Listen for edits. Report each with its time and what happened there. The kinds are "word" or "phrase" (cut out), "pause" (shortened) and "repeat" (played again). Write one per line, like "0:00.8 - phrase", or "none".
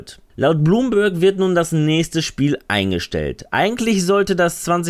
none